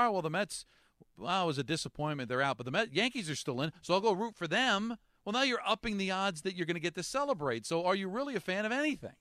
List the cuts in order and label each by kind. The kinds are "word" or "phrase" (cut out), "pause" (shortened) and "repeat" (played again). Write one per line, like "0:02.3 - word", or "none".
none